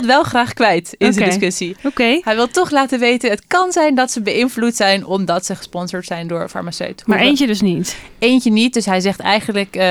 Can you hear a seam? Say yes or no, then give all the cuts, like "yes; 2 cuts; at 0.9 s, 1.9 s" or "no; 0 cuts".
no; 0 cuts